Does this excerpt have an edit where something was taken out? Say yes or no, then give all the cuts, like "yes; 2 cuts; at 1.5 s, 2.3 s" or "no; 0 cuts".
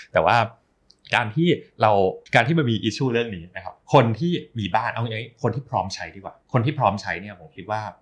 yes; 3 cuts; at 2.3 s, 3.8 s, 6.4 s